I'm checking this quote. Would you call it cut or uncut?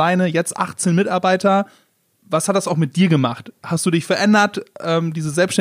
uncut